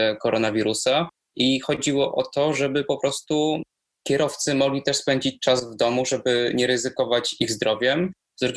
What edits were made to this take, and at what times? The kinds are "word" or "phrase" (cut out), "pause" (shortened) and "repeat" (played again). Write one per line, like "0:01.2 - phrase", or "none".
none